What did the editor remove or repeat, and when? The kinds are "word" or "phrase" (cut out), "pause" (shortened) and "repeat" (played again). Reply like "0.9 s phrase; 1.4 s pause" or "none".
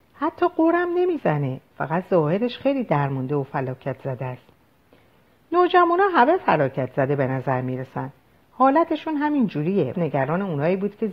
9.9 s word